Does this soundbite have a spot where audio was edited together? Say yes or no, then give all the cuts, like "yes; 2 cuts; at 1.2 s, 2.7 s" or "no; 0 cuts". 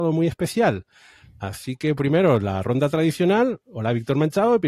no; 0 cuts